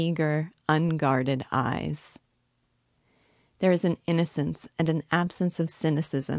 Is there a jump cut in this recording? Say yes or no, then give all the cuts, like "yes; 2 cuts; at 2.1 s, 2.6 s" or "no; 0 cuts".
no; 0 cuts